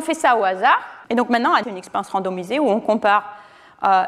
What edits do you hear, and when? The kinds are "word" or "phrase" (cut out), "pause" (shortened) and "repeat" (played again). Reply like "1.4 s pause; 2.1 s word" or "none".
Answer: 1.0 s pause; 1.6 s phrase

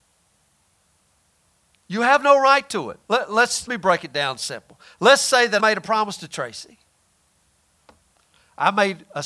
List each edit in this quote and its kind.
3.0 s pause; 3.7 s word; 5.6 s word

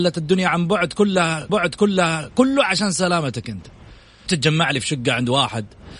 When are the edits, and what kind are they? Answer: 1.5 s repeat; 4.3 s word

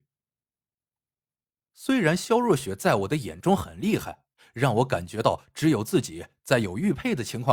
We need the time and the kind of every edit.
none

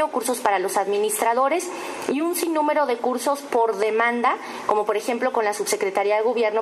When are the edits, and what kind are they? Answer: none

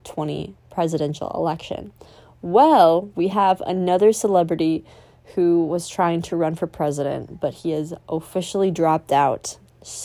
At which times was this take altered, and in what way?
none

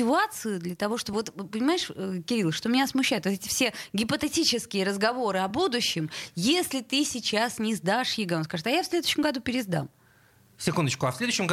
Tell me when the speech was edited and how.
none

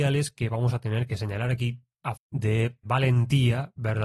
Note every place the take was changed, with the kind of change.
2.2 s word; 2.8 s word

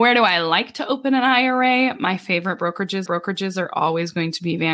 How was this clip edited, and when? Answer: 3.1 s repeat

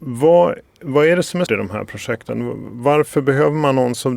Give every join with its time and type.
1.5 s word

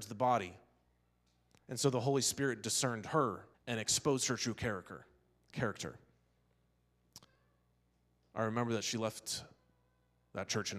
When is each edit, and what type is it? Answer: 3.5 s pause

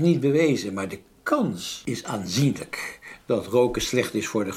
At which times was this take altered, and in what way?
none

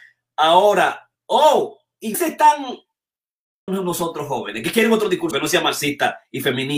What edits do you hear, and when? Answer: 1.2 s pause; 2.1 s word; 3.7 s phrase; 5.3 s word

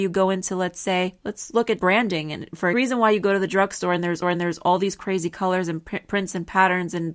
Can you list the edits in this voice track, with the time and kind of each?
1.8 s word; 2.7 s phrase; 4.2 s repeat

